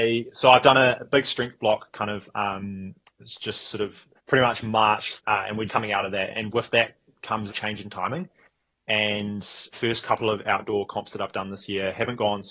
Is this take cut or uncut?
cut